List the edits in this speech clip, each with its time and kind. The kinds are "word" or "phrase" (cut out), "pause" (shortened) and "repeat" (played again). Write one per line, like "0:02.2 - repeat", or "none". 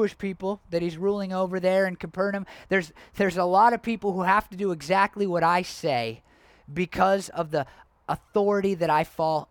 none